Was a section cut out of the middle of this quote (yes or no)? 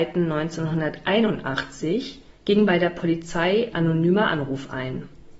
yes